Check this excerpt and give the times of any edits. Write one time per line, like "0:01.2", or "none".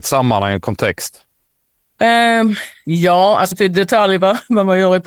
0:01.5
0:03.5